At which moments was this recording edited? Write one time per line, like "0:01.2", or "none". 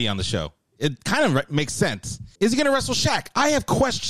0:02.3